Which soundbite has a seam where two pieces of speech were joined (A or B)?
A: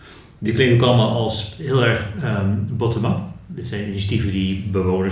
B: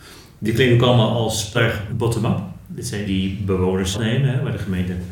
B